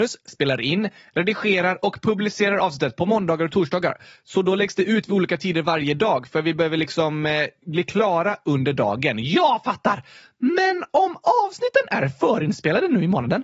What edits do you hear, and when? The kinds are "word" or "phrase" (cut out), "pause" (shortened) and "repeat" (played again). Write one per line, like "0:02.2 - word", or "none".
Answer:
none